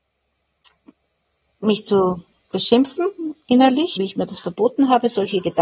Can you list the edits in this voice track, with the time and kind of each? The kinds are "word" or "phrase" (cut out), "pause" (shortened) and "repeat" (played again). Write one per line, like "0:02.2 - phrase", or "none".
0:04.0 - word